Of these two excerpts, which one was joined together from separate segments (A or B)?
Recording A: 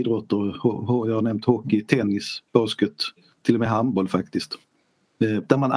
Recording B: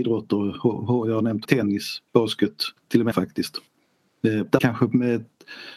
B